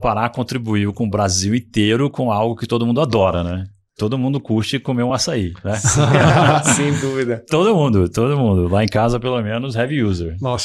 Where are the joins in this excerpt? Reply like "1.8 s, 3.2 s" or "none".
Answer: none